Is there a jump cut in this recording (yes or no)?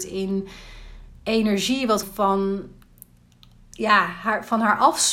yes